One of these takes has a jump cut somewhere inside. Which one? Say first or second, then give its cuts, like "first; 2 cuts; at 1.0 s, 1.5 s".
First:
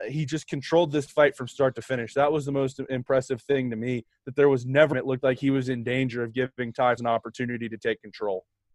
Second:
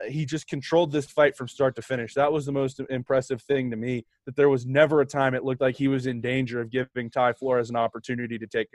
first; 2 cuts; at 4.9 s, 7.0 s